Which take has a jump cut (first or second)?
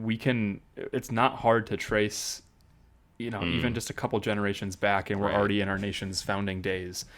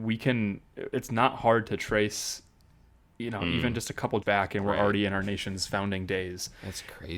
second